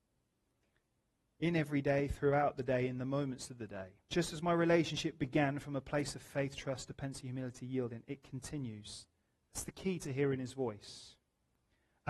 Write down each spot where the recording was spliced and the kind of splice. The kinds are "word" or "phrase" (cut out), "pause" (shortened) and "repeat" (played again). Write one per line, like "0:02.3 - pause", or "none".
0:04.0 - pause